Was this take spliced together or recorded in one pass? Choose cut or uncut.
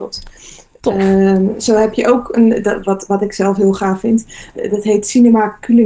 uncut